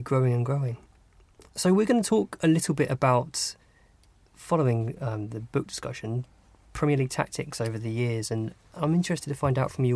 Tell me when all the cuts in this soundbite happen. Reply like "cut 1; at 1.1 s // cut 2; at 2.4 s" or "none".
none